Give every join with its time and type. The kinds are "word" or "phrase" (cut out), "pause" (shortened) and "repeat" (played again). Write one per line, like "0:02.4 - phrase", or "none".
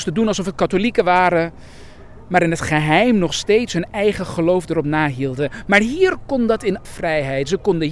0:06.8 - word

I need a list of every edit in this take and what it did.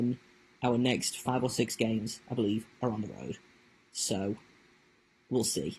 none

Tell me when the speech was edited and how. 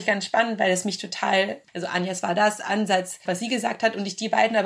0:01.7 - pause
0:03.3 - phrase

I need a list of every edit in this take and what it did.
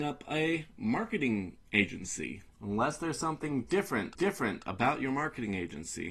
0:04.1 - repeat

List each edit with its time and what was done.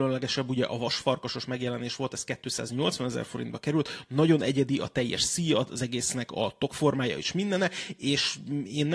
none

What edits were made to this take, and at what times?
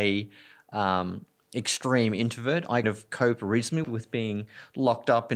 0:02.8 - word
0:03.8 - word

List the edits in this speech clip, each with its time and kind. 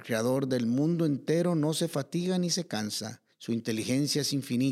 0:03.3 - pause

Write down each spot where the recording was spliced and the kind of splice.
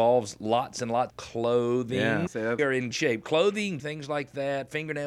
0:01.1 - word
0:02.3 - phrase
0:02.6 - phrase
0:02.9 - word
0:03.8 - word

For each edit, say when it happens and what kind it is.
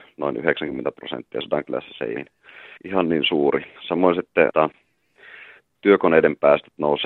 0:02.2 - phrase
0:02.8 - pause
0:03.8 - pause
0:04.5 - word

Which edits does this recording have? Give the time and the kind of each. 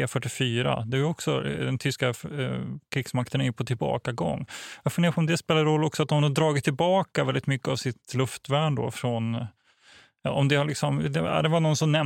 none

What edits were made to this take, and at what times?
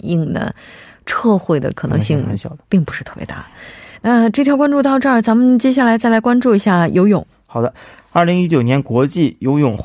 0:02.7 - word

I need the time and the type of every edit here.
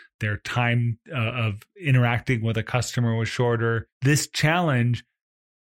0:03.9 - pause

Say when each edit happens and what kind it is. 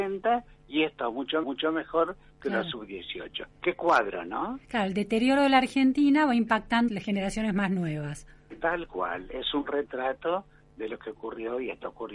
0:01.4 - repeat
0:06.9 - phrase

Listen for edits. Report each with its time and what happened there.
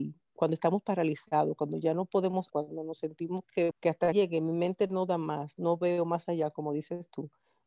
0:02.5 - word
0:03.7 - word
0:04.1 - word

